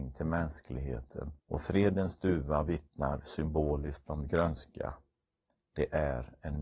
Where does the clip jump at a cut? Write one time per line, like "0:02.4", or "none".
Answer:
0:01.4